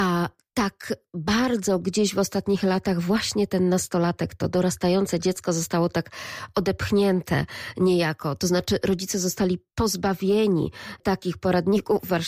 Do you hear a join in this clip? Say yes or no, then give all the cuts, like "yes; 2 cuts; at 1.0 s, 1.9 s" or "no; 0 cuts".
no; 0 cuts